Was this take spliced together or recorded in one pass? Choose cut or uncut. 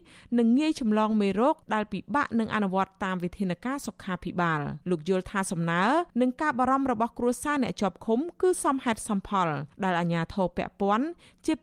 cut